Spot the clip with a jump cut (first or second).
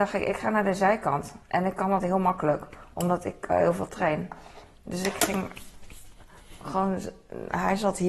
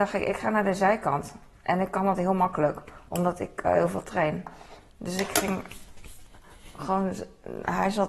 first